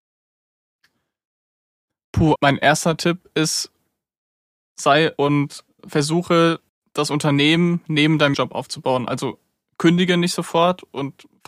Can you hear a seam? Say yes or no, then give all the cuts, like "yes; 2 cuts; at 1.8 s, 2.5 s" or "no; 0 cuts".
yes; 4 cuts; at 2.4 s, 5.2 s, 6.7 s, 8.3 s